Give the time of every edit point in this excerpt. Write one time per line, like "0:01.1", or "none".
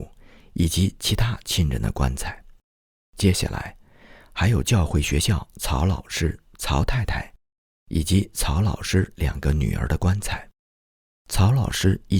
none